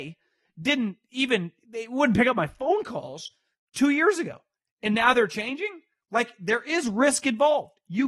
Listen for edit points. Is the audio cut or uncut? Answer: uncut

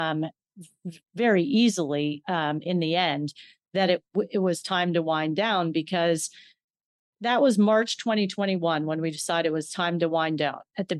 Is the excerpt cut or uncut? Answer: uncut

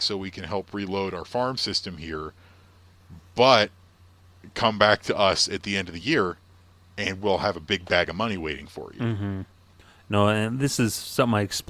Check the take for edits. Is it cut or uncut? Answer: uncut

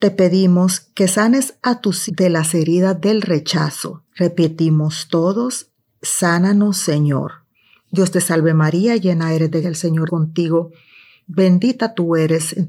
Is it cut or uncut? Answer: cut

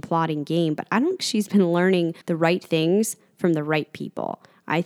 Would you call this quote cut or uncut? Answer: cut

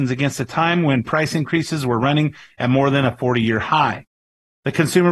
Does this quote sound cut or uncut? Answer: uncut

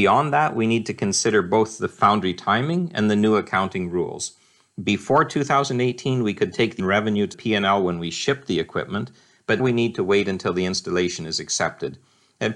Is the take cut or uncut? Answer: cut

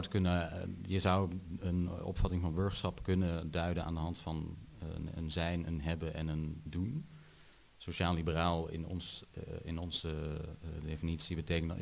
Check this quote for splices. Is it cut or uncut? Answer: uncut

